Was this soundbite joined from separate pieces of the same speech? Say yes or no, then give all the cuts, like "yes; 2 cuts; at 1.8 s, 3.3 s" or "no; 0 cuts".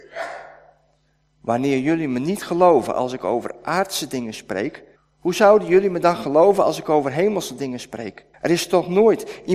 yes; 2 cuts; at 5.0 s, 8.3 s